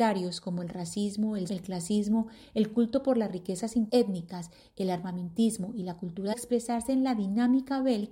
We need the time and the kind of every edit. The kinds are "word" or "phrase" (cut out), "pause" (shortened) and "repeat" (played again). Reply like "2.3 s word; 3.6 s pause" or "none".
1.5 s word; 3.9 s word; 6.3 s phrase